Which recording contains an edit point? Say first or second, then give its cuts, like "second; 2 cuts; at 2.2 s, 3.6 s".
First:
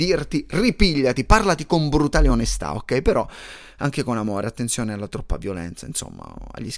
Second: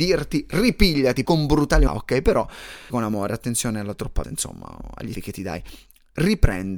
second; 5 cuts; at 1.2 s, 1.9 s, 2.9 s, 4.2 s, 5.1 s